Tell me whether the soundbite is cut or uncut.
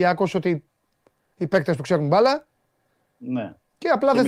uncut